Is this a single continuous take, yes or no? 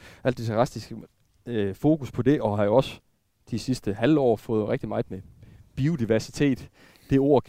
yes